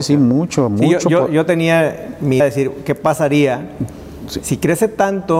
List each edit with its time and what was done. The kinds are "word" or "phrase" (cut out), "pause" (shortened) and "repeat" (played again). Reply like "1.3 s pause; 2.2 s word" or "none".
2.4 s word